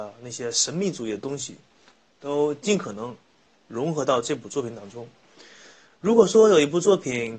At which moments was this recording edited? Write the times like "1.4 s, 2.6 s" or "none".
none